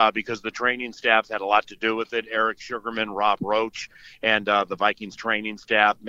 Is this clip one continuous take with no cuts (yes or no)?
yes